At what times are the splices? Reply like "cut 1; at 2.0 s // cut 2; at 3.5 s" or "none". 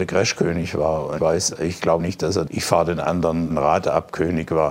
cut 1; at 1.2 s // cut 2; at 2.0 s // cut 3; at 2.5 s // cut 4; at 3.5 s

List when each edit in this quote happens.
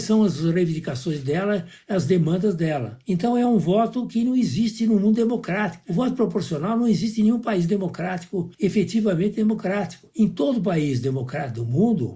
none

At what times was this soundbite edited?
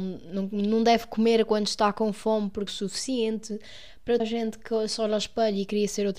cut 1; at 2.7 s // cut 2; at 4.2 s

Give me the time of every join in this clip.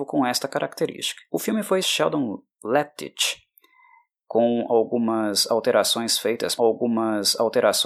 cut 1; at 1.3 s // cut 2; at 1.8 s // cut 3; at 6.6 s

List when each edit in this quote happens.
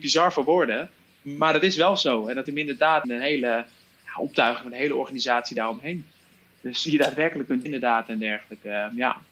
cut 1; at 2.5 s // cut 2; at 3.0 s // cut 3; at 6.9 s // cut 4; at 7.7 s

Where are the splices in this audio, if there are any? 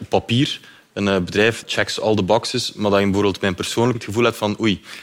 cut 1; at 1.6 s // cut 2; at 3.9 s

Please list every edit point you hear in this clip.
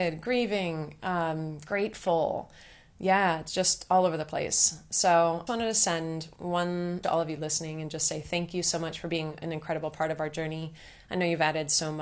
cut 1; at 5.5 s // cut 2; at 7.0 s

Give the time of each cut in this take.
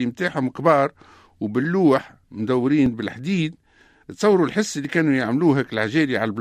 cut 1; at 2.2 s

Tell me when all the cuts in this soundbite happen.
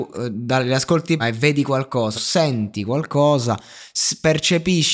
cut 1; at 1.2 s // cut 2; at 2.1 s

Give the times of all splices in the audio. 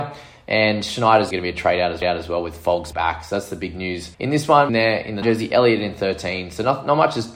cut 1; at 1.3 s // cut 2; at 2.0 s // cut 3; at 2.9 s // cut 4; at 4.1 s // cut 5; at 4.7 s // cut 6; at 5.2 s

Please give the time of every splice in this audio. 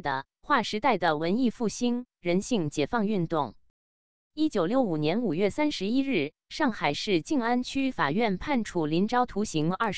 none

